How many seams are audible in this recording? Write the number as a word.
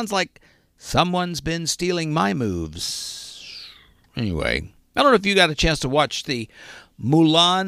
zero